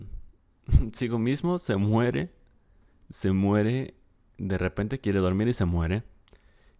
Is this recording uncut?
yes; 0 cuts

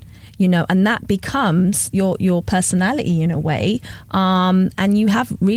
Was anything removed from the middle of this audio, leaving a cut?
no; 0 cuts

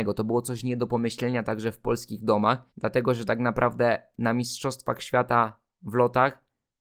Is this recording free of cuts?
no; 1 cut; at 2.7 s

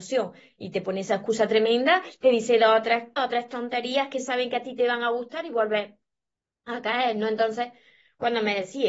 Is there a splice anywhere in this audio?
yes; 1 cut; at 3.2 s

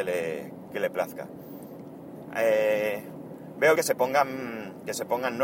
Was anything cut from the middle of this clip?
yes; 1 cut; at 3.8 s

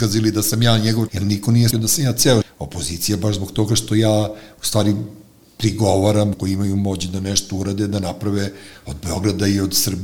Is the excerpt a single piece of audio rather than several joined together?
no; 4 cuts; at 1.1 s, 1.7 s, 2.4 s, 6.3 s

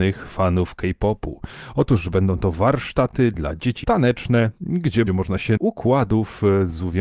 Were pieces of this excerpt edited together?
yes; 3 cuts; at 3.8 s, 5.1 s, 5.6 s

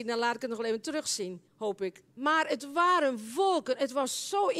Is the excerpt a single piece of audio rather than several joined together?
no; 2 cuts; at 1.5 s, 2.0 s

